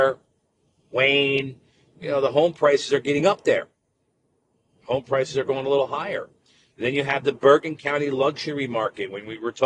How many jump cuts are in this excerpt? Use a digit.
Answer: 0